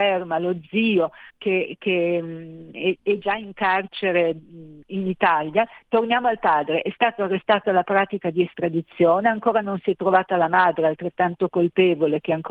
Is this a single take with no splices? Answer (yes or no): no